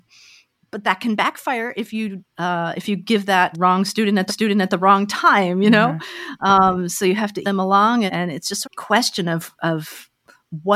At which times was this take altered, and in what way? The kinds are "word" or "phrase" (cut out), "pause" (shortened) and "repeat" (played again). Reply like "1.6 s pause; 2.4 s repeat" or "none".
2.3 s pause; 3.5 s phrase; 4.3 s repeat; 7.4 s word; 8.1 s word; 8.6 s phrase